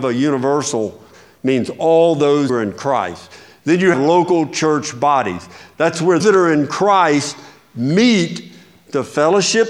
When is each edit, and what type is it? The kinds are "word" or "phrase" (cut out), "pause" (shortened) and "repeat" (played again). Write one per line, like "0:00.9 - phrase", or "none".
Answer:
0:01.1 - word
0:02.5 - word
0:03.9 - word
0:06.2 - word